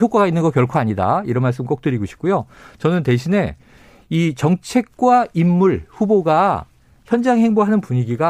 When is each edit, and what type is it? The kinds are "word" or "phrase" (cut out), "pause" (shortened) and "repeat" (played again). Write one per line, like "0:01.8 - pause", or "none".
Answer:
none

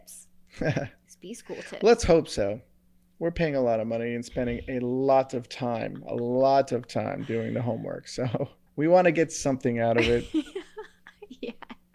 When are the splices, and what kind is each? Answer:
0:08.7 - pause

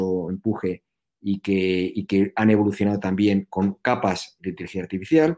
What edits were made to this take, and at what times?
0:04.4 - word

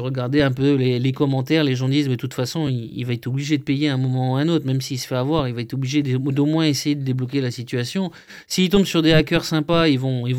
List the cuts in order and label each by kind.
none

